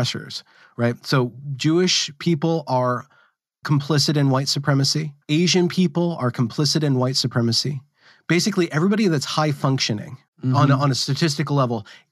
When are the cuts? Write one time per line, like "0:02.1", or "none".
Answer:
0:05.2
0:10.3

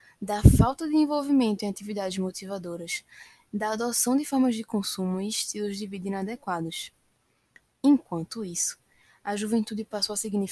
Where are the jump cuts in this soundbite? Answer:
none

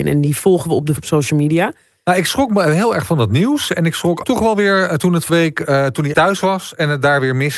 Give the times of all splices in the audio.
0:01.0
0:04.2
0:05.3
0:06.1

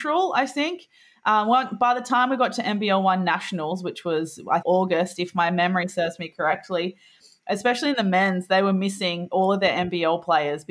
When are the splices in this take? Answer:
0:04.6

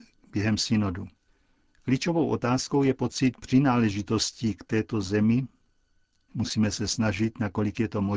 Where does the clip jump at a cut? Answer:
none

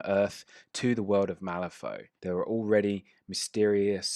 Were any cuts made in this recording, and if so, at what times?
0:02.2

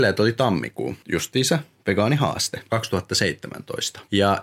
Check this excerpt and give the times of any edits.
0:01.0

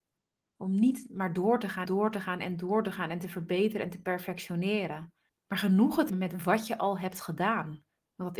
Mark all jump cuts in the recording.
0:01.9
0:05.3
0:06.1

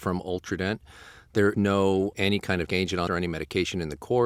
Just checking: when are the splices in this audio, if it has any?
0:01.5
0:02.1
0:02.7
0:03.1

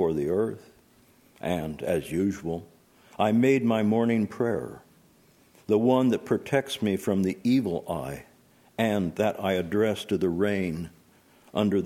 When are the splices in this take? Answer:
none

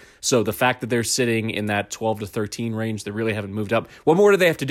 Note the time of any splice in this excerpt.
none

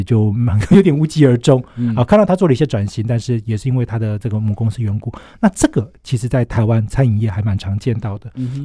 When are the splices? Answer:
none

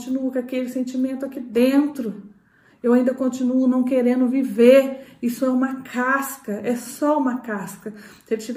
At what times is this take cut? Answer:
none

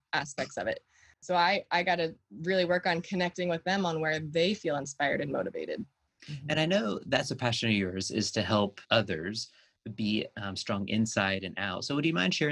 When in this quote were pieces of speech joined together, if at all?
0:08.8

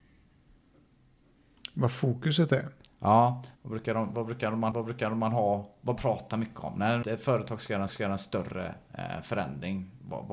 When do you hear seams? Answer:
0:03.5
0:04.7
0:06.0
0:07.0
0:07.9

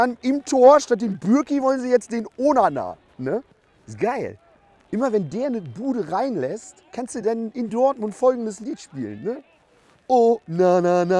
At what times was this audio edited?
none

